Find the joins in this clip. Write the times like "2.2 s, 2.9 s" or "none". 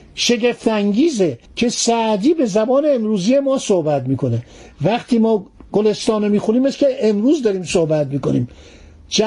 1.5 s